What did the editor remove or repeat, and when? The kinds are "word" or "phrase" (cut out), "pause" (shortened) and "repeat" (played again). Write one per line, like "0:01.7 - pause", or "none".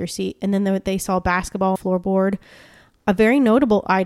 0:01.8 - phrase